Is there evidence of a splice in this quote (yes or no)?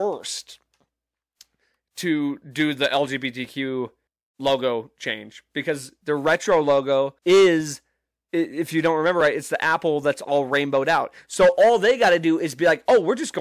yes